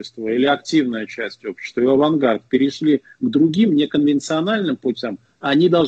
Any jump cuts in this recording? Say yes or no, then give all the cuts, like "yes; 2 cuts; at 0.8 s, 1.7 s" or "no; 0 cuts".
no; 0 cuts